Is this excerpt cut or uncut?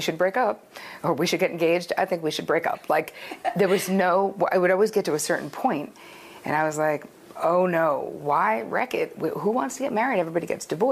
uncut